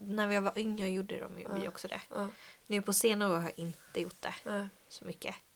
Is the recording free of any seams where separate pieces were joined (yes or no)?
yes